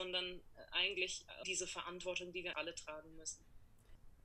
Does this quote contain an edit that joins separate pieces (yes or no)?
yes